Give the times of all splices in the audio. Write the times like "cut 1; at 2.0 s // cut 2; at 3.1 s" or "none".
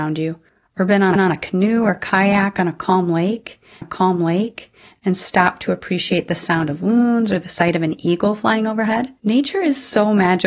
cut 1; at 1.2 s // cut 2; at 3.8 s // cut 3; at 9.2 s